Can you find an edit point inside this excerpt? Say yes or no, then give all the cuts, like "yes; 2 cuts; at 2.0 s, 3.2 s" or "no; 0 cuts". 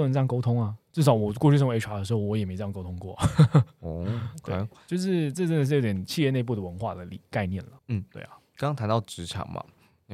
yes; 1 cut; at 7.8 s